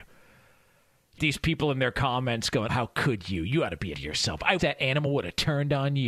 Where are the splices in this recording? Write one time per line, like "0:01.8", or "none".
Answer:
0:01.2
0:02.7
0:03.9
0:04.6